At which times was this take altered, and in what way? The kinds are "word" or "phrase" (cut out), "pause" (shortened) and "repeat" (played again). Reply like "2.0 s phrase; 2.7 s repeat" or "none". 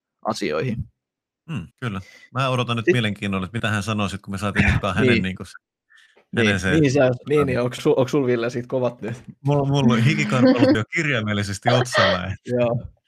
1.7 s pause; 4.8 s phrase; 7.2 s word; 7.8 s word; 9.0 s word; 10.7 s word